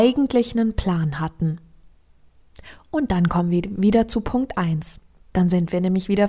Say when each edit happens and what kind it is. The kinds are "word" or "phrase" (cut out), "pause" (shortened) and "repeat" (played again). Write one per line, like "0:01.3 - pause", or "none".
none